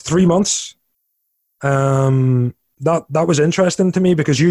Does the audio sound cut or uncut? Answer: uncut